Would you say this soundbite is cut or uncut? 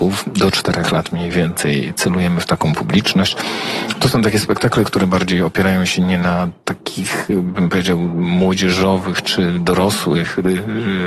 uncut